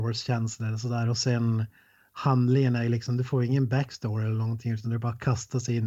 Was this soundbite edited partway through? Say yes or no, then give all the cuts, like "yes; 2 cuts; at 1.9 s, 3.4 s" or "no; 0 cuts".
no; 0 cuts